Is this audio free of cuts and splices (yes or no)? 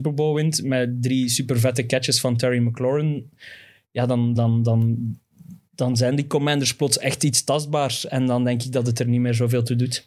no